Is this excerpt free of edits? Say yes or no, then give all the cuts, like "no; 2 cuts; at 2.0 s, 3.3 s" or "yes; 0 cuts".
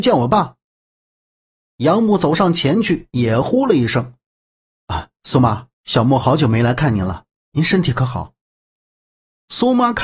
no; 1 cut; at 5.7 s